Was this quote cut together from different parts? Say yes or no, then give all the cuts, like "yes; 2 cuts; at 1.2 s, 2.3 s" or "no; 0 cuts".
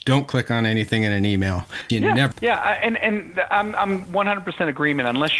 yes; 3 cuts; at 1.9 s, 2.3 s, 4.1 s